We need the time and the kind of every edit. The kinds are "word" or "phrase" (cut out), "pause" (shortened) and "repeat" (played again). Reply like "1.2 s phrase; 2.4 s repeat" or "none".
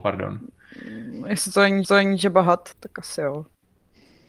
1.8 s repeat; 2.7 s word

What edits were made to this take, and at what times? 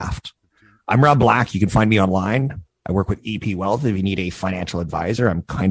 none

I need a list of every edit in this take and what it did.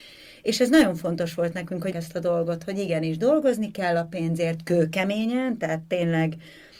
1.9 s word

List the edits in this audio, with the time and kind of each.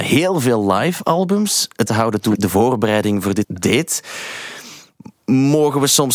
1.9 s phrase; 2.3 s word; 3.4 s word

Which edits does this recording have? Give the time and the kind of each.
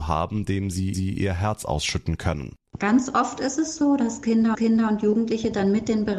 0.9 s repeat; 4.5 s repeat

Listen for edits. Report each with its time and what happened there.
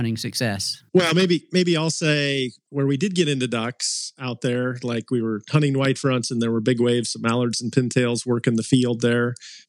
none

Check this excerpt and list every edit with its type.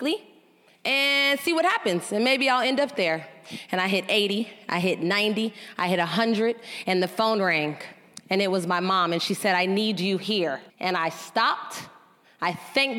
10.7 s pause

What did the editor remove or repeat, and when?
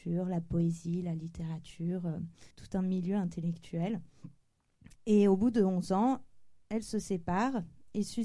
2.5 s pause

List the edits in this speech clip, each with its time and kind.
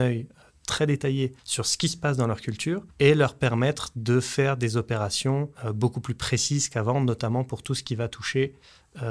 1.4 s pause; 2.9 s pause; 5.5 s pause

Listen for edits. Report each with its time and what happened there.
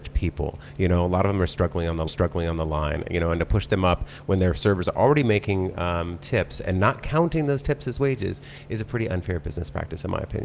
2.1 s repeat

